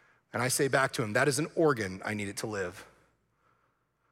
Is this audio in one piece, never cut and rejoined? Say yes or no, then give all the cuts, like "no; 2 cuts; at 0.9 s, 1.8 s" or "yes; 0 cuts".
yes; 0 cuts